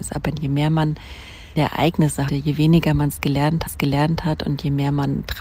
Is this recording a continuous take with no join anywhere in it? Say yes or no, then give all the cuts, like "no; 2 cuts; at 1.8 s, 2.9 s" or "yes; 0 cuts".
no; 3 cuts; at 1.6 s, 2.3 s, 3.7 s